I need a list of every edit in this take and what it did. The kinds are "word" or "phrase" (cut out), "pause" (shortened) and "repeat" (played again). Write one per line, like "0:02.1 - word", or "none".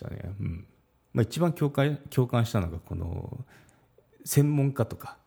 none